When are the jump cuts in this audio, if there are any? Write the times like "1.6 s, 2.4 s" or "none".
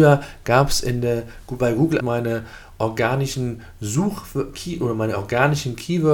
2.0 s